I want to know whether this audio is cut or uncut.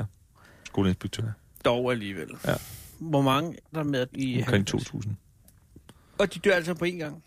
cut